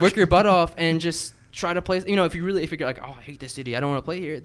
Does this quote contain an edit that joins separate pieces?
no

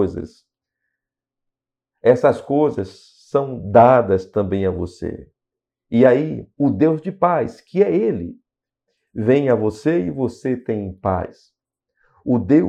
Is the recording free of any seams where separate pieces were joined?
yes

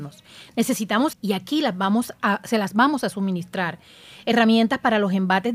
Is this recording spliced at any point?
yes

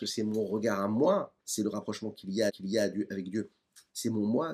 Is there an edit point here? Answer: yes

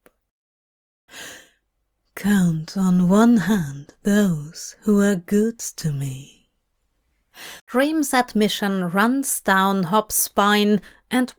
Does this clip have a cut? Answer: yes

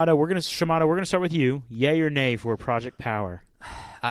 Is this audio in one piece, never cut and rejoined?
yes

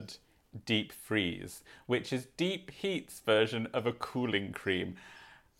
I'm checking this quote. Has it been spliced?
no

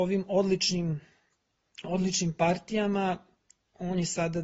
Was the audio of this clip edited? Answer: no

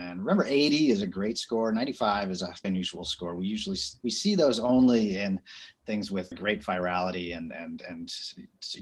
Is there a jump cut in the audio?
yes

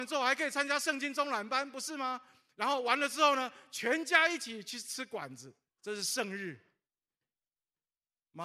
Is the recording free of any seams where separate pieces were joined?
no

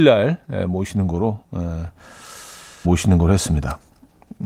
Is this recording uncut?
no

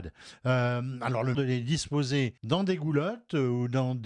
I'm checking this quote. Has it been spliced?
yes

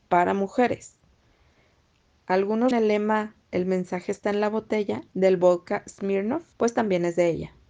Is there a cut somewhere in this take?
yes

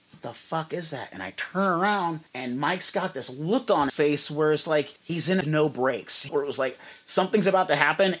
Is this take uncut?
no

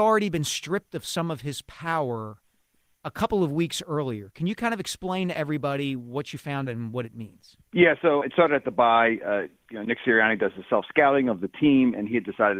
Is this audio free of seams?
no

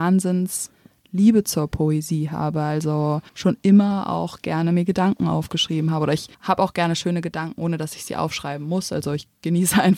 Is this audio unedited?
no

